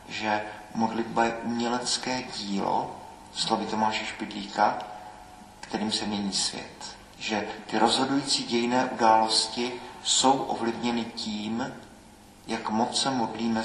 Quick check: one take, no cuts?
no; 1 cut; at 7.1 s

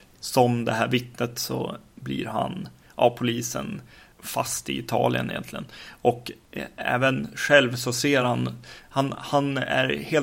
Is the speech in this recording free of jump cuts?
yes; 0 cuts

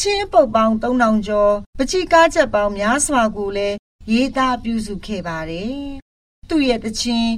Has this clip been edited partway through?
yes; 1 cut; at 1.7 s

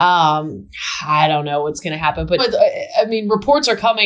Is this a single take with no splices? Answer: no; 1 cut; at 2.4 s

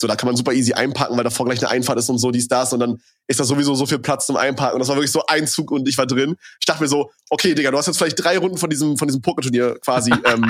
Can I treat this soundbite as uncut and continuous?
yes; 0 cuts

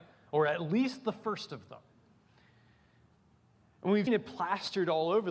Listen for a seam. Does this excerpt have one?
yes; 1 cut; at 4.1 s

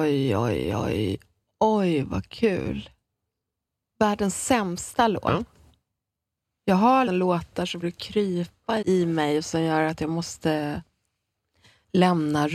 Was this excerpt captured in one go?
no; 3 cuts; at 7.1 s, 7.8 s, 8.8 s

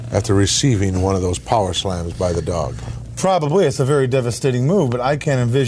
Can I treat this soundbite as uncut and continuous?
yes; 0 cuts

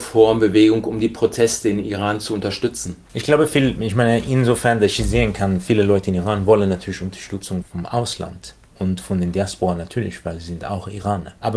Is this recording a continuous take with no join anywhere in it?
yes; 0 cuts

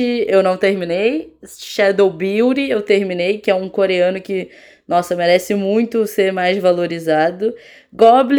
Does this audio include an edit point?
no; 0 cuts

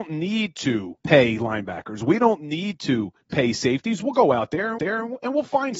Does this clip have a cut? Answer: yes; 3 cuts; at 1.0 s, 3.2 s, 4.8 s

